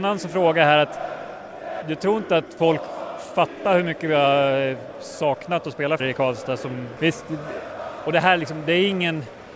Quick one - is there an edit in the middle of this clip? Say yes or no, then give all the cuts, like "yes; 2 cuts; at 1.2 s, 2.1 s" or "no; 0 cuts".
yes; 3 cuts; at 1.8 s, 6.0 s, 7.0 s